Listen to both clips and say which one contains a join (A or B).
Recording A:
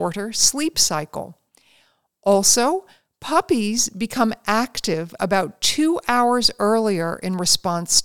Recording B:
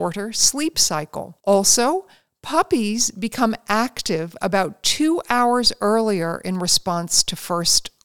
B